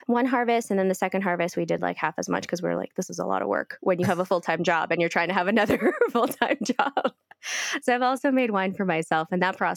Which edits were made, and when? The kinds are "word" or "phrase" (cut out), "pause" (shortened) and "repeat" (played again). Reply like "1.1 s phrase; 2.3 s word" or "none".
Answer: none